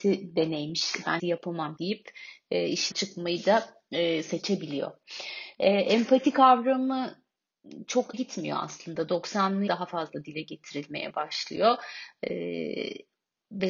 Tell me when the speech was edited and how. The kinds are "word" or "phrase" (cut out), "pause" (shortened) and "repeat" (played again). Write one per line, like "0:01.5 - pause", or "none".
0:01.2 - word
0:01.8 - word
0:02.9 - word
0:08.1 - word
0:09.7 - word